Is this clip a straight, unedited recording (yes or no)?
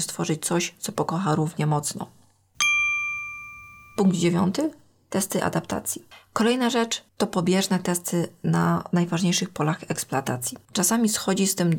yes